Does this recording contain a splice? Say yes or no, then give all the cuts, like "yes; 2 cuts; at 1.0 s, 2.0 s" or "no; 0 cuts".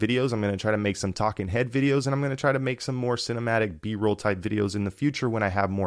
no; 0 cuts